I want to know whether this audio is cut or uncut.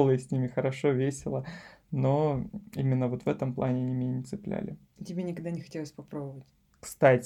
uncut